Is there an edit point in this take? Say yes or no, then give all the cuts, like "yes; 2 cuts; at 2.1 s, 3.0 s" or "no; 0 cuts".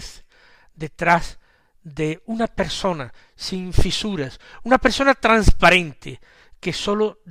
no; 0 cuts